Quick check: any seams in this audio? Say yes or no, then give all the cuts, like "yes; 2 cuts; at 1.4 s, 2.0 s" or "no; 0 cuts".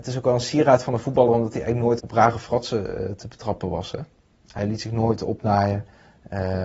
yes; 2 cuts; at 2.0 s, 4.6 s